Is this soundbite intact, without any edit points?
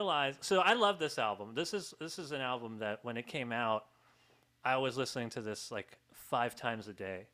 yes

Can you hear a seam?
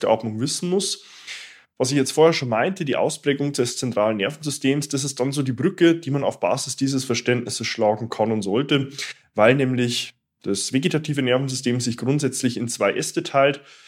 no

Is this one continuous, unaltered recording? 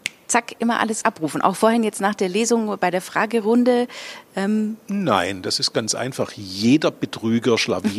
no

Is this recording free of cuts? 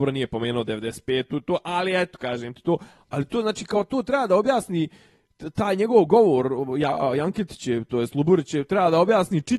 yes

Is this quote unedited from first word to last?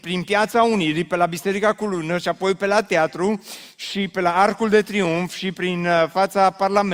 yes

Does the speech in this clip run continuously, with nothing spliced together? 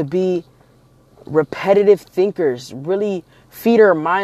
yes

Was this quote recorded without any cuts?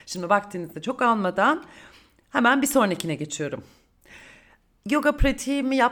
yes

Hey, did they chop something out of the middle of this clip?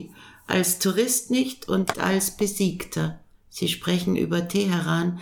yes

